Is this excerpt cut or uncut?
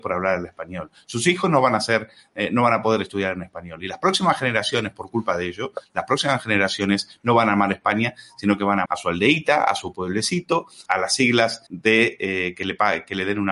cut